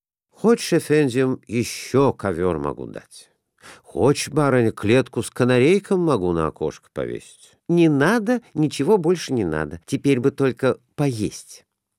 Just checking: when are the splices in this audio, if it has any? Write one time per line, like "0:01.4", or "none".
0:07.6
0:09.8